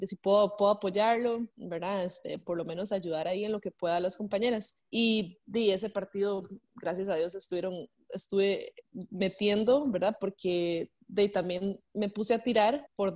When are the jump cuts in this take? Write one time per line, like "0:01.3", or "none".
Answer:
0:01.5